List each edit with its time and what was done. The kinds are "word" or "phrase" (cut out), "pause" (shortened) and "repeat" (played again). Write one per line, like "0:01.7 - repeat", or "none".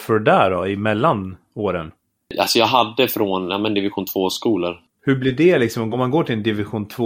0:05.9 - word